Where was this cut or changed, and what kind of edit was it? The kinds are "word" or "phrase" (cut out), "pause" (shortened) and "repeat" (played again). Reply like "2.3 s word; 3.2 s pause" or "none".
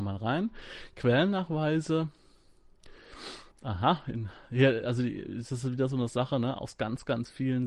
3.5 s pause